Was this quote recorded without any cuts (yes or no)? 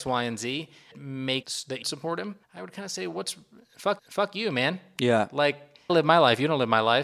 no